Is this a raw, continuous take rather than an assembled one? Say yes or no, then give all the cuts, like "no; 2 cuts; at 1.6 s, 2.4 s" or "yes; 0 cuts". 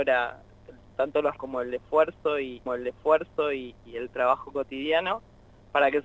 no; 2 cuts; at 1.4 s, 2.7 s